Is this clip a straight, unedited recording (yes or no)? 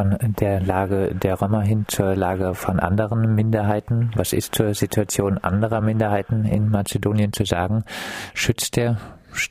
yes